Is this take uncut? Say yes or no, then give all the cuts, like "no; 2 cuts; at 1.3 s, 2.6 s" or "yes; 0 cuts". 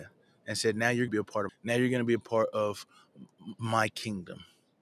no; 2 cuts; at 1.1 s, 1.5 s